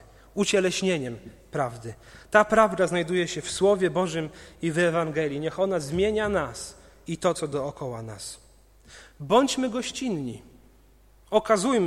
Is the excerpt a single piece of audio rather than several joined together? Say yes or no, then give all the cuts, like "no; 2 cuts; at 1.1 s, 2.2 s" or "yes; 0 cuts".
yes; 0 cuts